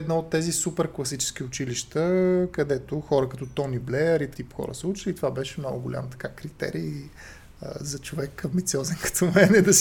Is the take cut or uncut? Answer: cut